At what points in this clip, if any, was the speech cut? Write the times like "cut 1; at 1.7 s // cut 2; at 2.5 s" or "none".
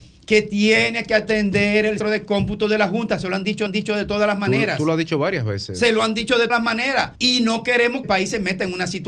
cut 1; at 2.0 s // cut 2; at 3.7 s // cut 3; at 6.5 s // cut 4; at 7.1 s // cut 5; at 8.0 s